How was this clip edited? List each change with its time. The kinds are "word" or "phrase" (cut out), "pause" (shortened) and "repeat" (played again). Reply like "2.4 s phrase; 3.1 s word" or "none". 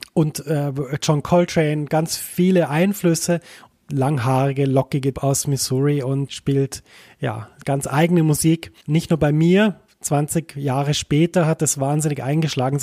3.7 s phrase; 5.1 s word; 6.3 s word; 8.8 s pause